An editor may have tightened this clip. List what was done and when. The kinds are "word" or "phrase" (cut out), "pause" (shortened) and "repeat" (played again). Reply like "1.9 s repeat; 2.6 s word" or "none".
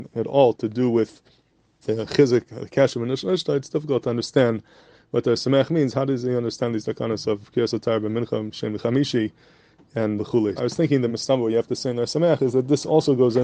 1.8 s word; 10.2 s word; 10.6 s word; 11.1 s word